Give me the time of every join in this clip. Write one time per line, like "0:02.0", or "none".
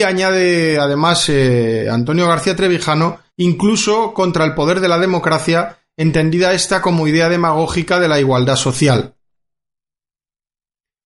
0:03.3